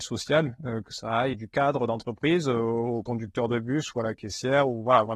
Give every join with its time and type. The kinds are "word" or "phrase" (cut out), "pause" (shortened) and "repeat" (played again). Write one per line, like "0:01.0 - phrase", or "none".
0:01.3 - word